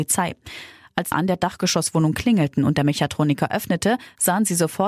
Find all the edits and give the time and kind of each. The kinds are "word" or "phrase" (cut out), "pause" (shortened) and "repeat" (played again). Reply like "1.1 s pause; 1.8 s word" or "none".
1.1 s phrase